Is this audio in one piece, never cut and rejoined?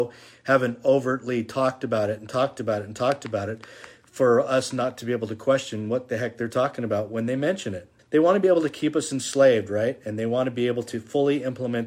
no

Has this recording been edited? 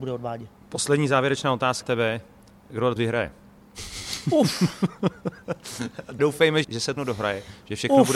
yes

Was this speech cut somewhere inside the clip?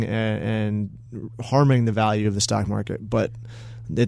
no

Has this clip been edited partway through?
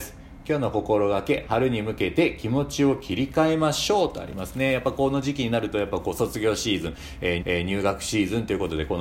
yes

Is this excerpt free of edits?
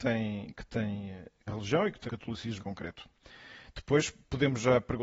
no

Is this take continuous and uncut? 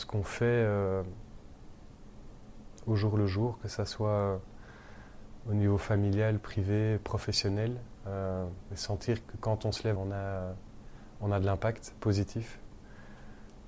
no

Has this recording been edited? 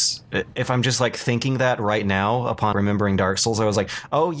yes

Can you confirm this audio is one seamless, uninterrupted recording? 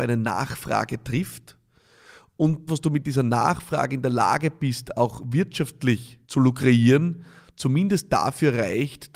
no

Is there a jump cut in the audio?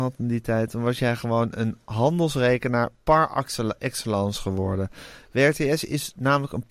no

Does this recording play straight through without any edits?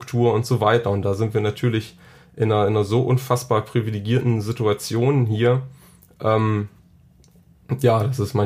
yes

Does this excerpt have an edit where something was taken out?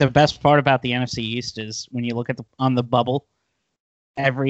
yes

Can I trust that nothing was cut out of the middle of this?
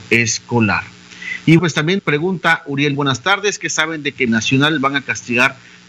no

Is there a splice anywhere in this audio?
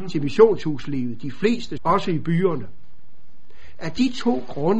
yes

